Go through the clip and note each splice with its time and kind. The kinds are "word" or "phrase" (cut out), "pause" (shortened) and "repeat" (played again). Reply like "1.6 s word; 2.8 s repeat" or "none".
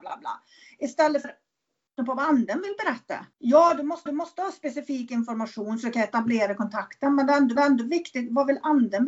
1.2 s word; 2.0 s word; 3.3 s pause; 4.1 s repeat; 7.6 s repeat